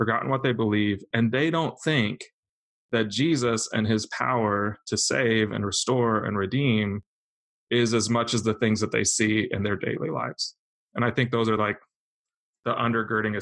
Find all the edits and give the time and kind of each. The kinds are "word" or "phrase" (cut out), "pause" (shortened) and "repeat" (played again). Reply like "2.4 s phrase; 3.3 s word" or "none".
none

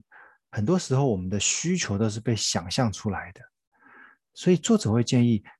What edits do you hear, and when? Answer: none

